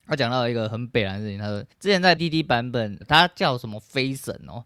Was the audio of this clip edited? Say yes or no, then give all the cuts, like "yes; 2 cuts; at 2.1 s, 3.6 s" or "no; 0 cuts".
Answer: yes; 3 cuts; at 1.7 s, 2.2 s, 3.0 s